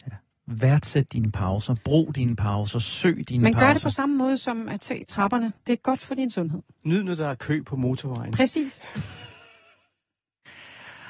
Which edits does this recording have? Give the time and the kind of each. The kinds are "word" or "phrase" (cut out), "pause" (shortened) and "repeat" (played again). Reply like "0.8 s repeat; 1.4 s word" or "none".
5.6 s pause